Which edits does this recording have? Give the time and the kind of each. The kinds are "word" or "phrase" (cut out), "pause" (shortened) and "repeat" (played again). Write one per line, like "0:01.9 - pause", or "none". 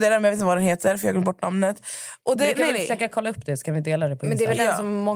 none